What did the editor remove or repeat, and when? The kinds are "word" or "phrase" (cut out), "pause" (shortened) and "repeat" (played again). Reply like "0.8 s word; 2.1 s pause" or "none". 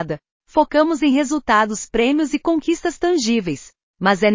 none